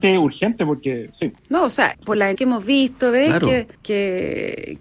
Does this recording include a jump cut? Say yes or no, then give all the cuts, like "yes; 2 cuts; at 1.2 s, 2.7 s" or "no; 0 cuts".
yes; 4 cuts; at 1.4 s, 1.9 s, 2.3 s, 3.7 s